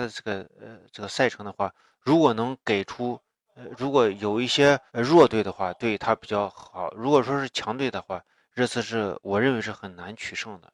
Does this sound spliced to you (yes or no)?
yes